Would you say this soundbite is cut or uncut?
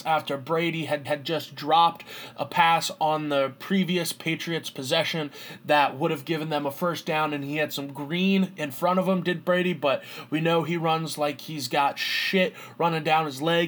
cut